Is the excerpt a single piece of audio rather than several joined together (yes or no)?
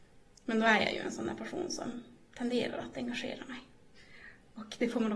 yes